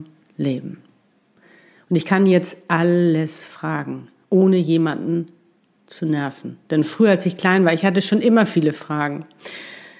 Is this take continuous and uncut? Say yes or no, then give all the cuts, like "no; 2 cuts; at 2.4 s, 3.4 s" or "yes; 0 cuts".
yes; 0 cuts